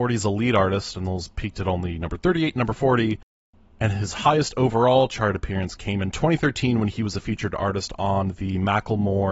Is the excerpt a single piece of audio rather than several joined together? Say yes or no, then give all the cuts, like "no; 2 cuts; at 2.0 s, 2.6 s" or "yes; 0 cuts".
yes; 0 cuts